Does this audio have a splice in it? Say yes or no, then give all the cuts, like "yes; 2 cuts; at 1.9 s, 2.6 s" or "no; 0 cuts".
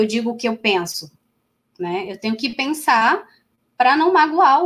no; 0 cuts